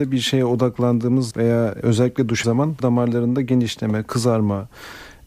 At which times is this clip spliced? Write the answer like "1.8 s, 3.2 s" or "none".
1.3 s, 1.8 s, 2.4 s, 2.8 s